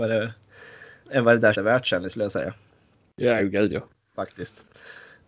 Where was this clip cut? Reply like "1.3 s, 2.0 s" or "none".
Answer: 1.0 s, 1.5 s, 2.1 s, 3.4 s